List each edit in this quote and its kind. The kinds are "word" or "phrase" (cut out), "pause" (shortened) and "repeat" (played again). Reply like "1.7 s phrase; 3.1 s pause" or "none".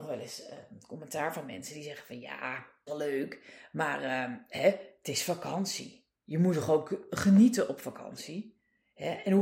2.9 s word; 6.2 s pause